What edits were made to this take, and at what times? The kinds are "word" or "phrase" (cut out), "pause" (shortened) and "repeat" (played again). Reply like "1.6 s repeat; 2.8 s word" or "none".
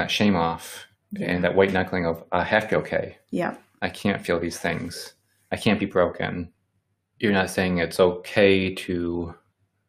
none